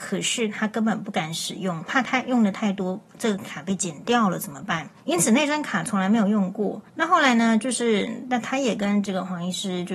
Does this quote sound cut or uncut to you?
cut